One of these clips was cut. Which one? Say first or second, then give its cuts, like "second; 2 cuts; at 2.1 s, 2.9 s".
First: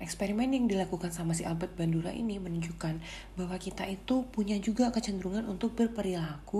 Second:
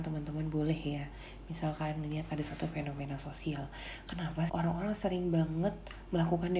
second; 1 cut; at 4.5 s